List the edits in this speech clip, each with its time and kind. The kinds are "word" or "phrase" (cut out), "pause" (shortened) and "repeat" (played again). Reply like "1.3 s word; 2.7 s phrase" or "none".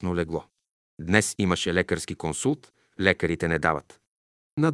none